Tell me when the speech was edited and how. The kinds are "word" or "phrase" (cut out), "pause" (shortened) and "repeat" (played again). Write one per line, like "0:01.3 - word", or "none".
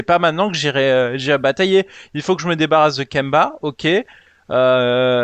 none